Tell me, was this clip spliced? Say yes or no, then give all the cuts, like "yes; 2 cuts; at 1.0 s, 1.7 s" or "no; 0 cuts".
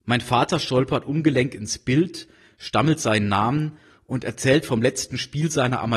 no; 0 cuts